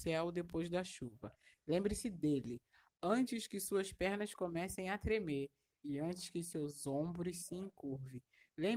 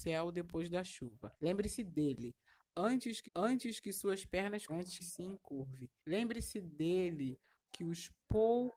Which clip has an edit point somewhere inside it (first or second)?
second